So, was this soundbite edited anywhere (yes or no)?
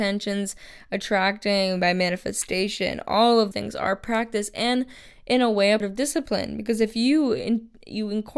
yes